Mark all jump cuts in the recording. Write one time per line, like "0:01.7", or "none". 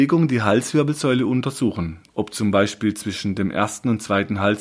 none